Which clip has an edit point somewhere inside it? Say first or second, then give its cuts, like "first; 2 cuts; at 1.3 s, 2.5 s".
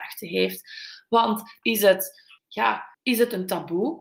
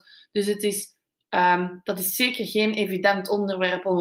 first; 3 cuts; at 1.6 s, 2.4 s, 2.9 s